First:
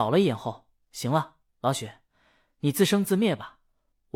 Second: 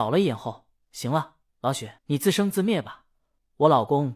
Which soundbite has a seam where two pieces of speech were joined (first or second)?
second